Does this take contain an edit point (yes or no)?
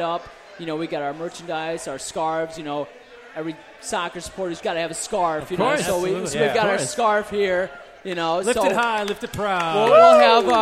yes